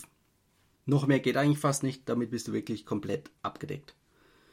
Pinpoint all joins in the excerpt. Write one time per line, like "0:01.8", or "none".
0:03.4